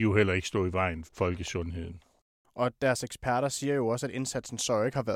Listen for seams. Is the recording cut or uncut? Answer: cut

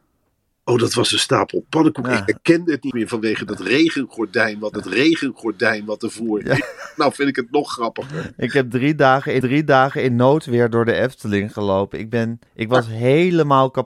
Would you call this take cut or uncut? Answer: cut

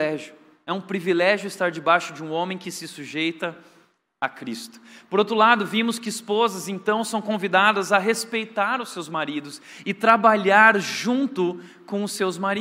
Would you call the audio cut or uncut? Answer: uncut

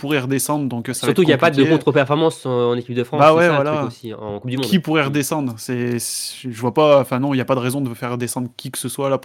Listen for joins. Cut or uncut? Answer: uncut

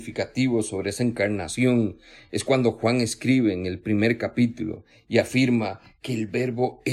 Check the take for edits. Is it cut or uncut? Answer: uncut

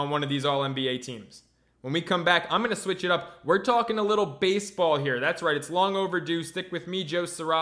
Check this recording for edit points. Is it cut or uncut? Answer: uncut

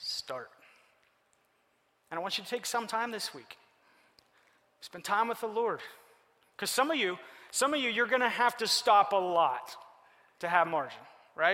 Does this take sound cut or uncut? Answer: uncut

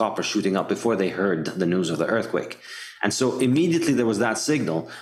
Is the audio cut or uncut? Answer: uncut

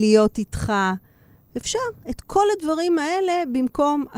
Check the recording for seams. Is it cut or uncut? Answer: uncut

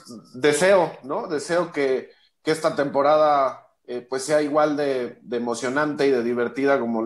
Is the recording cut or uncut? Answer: uncut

